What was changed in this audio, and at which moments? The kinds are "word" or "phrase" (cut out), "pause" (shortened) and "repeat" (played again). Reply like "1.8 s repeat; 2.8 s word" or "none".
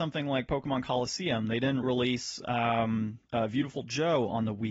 1.8 s word; 3.3 s pause